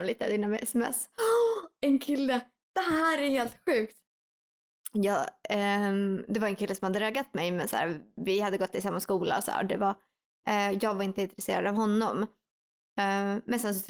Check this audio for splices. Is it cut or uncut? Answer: uncut